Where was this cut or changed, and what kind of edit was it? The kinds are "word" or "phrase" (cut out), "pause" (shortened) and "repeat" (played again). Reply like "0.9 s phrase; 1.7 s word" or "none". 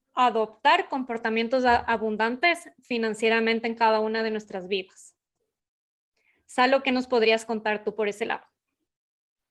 none